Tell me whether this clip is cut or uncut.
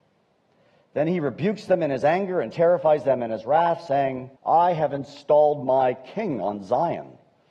cut